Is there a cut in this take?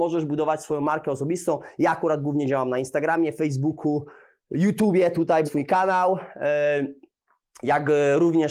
yes; 1 cut; at 5.4 s

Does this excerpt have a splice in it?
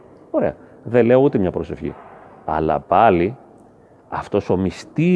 no; 0 cuts

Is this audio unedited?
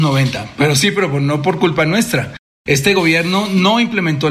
yes; 0 cuts

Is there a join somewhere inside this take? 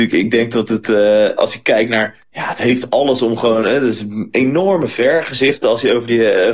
yes; 1 cut; at 2.2 s

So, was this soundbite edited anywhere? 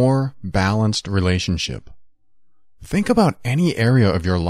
no; 0 cuts

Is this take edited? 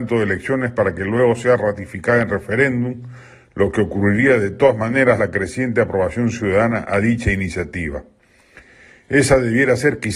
yes; 1 cut; at 5.2 s

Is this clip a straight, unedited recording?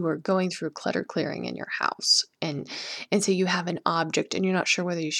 yes; 0 cuts

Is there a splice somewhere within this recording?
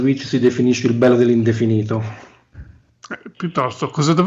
no; 0 cuts

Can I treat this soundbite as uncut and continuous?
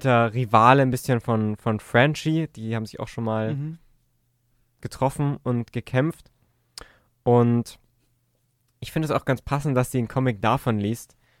yes; 0 cuts

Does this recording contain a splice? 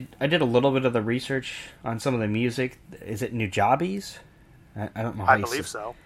no; 0 cuts

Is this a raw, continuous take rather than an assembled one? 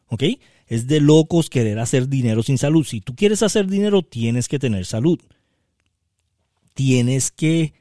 yes; 0 cuts

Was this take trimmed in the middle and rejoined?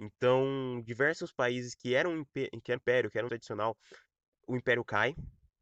yes; 2 cuts; at 2.8 s, 3.3 s

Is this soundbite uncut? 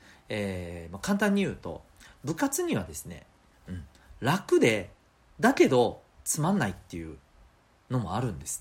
yes; 0 cuts

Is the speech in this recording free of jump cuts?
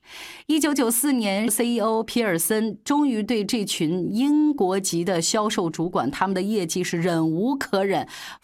no; 1 cut; at 1.5 s

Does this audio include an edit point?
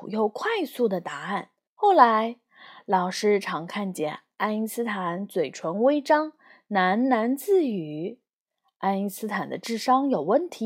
yes; 1 cut; at 1.7 s

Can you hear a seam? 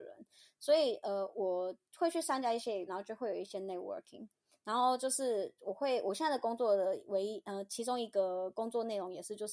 yes; 1 cut; at 2.9 s

